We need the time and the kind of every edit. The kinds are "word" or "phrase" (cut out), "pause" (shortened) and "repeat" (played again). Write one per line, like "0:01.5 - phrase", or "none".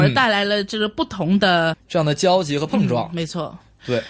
0:01.7 - word